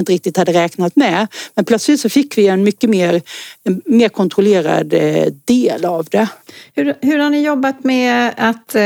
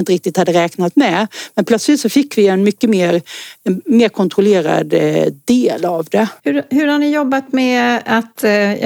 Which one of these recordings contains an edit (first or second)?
second